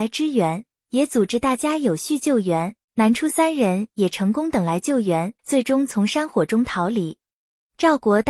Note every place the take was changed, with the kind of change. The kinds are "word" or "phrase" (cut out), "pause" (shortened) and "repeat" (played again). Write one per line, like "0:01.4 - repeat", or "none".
0:02.8 - pause
0:05.4 - pause